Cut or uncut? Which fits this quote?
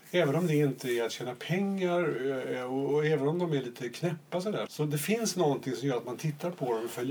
cut